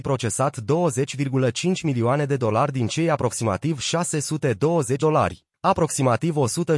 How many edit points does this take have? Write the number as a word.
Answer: one